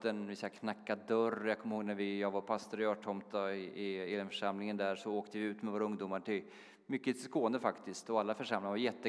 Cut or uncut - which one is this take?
uncut